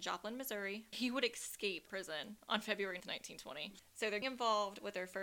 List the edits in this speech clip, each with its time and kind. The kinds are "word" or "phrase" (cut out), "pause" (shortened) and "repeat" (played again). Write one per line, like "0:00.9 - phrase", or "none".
0:00.9 - word
0:01.9 - word
0:03.0 - word
0:04.2 - word